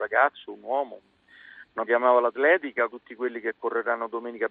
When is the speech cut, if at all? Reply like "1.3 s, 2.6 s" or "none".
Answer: 1.9 s, 2.9 s